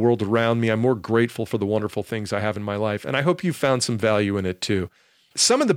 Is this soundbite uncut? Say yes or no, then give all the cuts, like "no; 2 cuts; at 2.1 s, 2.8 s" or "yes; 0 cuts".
yes; 0 cuts